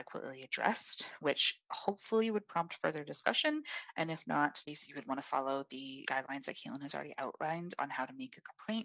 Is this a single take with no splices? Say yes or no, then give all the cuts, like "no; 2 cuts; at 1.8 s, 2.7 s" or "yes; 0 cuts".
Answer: yes; 0 cuts